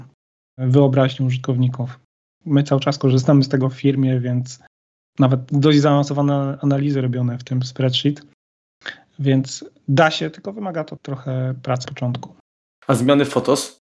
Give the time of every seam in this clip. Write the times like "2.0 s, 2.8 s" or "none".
5.5 s, 11.0 s, 11.9 s